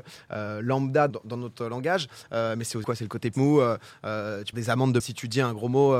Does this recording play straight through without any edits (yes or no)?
no